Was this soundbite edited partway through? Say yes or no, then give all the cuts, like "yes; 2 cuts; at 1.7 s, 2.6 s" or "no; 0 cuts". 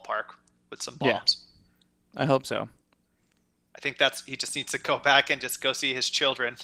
no; 0 cuts